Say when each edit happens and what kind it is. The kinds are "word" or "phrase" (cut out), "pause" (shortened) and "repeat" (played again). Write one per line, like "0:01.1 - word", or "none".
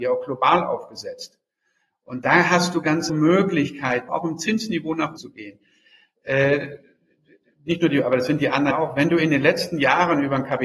0:03.1 - word
0:04.1 - word
0:05.2 - word
0:08.7 - word